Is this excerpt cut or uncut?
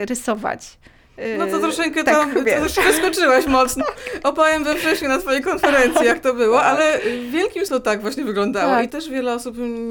cut